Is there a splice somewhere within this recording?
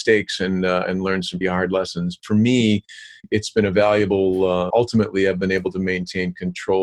yes; 4 cuts; at 1.4 s, 2.2 s, 3.5 s, 4.7 s

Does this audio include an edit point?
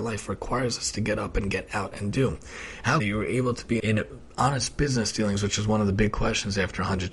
yes; 2 cuts; at 3.0 s, 3.8 s

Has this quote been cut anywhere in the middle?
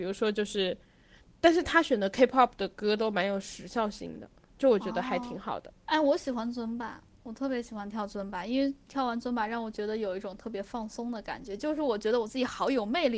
yes; 1 cut; at 5.8 s

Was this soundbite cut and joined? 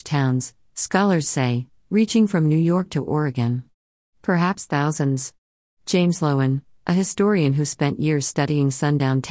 no; 0 cuts

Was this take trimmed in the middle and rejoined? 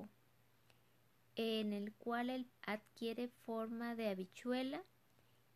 yes; 1 cut; at 2.5 s

